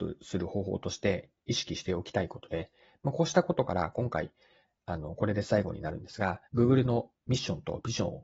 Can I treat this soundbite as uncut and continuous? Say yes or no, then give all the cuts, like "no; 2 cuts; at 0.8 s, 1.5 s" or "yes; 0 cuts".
no; 2 cuts; at 6.5 s, 7.2 s